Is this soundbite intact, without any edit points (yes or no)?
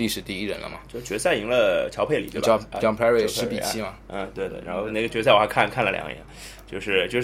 yes